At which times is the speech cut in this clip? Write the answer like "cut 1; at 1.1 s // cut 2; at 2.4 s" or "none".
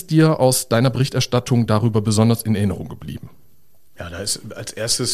none